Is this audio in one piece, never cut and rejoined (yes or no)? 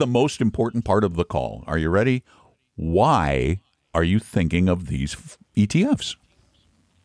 yes